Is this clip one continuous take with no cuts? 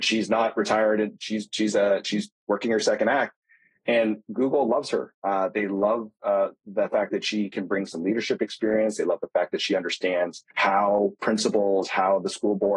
no; 1 cut; at 10.5 s

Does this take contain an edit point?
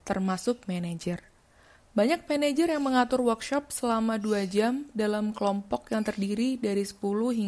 no; 0 cuts

